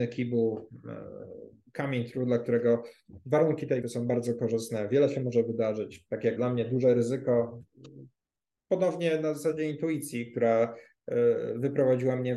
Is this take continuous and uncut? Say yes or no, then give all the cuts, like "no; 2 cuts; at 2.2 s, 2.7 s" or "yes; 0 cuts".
no; 2 cuts; at 3.8 s, 6.4 s